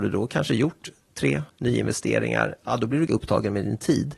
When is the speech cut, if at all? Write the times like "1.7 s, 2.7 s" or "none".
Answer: 1.5 s, 3.1 s